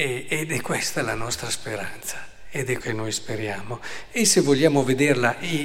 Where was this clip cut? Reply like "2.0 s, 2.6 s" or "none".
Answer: 2.8 s